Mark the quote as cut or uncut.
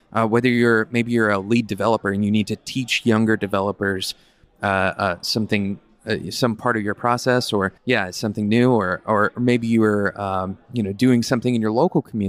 cut